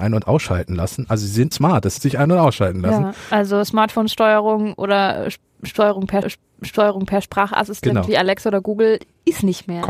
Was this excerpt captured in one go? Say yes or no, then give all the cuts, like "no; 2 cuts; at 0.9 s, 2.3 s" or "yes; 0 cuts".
no; 3 cuts; at 1.5 s, 2.0 s, 6.2 s